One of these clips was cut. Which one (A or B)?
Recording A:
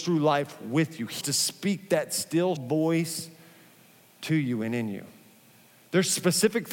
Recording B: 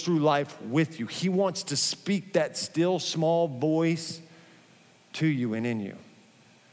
A